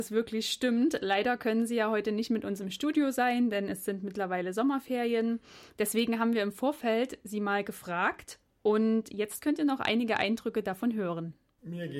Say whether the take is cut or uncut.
uncut